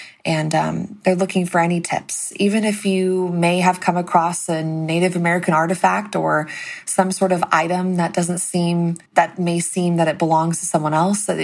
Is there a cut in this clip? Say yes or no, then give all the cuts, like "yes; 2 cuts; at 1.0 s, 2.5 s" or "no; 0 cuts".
yes; 1 cut; at 9.1 s